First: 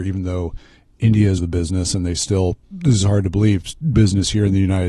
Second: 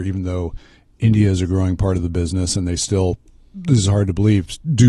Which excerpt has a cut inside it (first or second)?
first